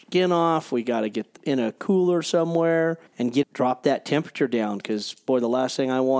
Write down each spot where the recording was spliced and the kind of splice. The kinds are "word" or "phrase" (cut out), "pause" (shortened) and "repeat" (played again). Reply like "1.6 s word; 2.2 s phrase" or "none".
1.4 s word; 3.1 s pause; 3.4 s word